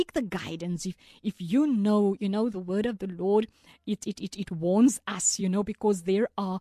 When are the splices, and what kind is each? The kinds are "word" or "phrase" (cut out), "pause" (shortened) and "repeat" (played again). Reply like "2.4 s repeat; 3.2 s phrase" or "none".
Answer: none